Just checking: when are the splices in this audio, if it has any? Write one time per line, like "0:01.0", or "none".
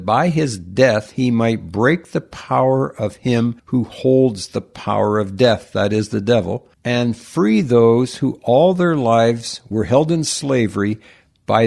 0:03.6
0:06.7